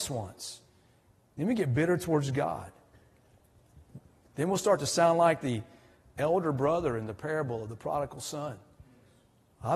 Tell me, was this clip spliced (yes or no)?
no